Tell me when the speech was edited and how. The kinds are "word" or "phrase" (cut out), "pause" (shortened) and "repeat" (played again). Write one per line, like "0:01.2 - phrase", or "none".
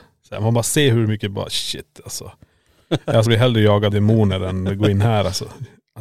0:03.3 - word
0:03.9 - word